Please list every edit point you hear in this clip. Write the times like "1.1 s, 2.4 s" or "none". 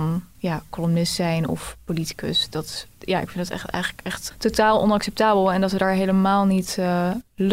4.3 s